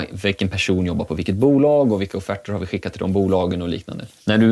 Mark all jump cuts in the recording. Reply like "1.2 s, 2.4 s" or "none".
none

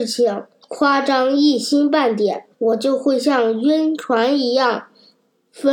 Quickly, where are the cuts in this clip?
2.5 s

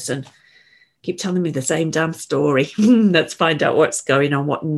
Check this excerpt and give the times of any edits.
none

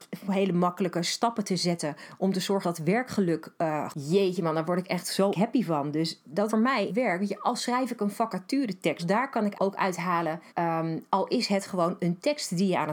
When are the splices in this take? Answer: 2.6 s, 3.9 s, 5.3 s, 6.5 s, 6.9 s, 9.0 s, 9.5 s, 10.5 s

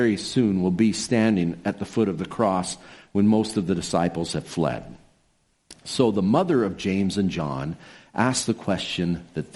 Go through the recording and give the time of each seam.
none

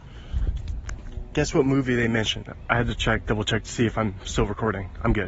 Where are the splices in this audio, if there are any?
none

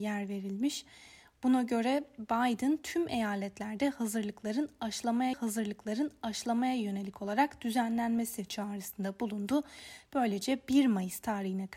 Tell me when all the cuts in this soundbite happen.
5.3 s

